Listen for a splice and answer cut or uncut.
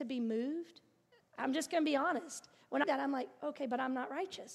cut